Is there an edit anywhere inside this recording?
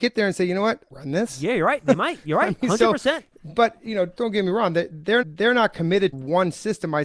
yes; 4 cuts; at 0.9 s, 4.2 s, 5.2 s, 6.1 s

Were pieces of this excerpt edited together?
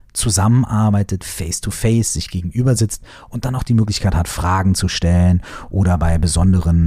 no; 0 cuts

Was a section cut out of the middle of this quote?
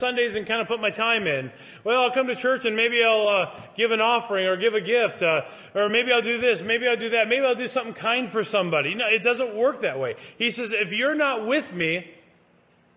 no; 0 cuts

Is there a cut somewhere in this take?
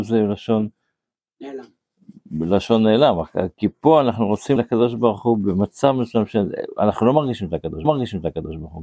yes; 3 cuts; at 3.6 s, 4.6 s, 7.8 s

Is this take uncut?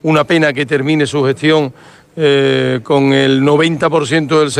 yes; 0 cuts

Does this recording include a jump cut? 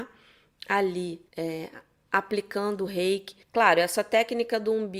yes; 2 cuts; at 1.3 s, 3.4 s

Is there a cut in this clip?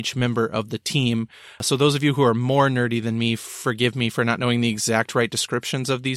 no; 0 cuts

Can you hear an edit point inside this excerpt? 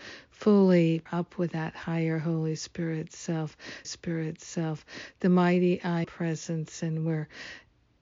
yes; 3 cuts; at 1.1 s, 3.8 s, 6.0 s

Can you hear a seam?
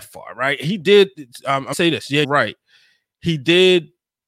yes; 2 cuts; at 1.7 s, 2.2 s

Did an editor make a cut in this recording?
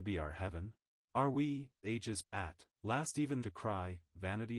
yes; 5 cuts; at 0.9 s, 1.8 s, 2.2 s, 2.7 s, 3.4 s

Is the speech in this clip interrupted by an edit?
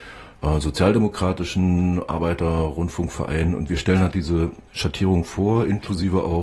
yes; 1 cut; at 4.7 s

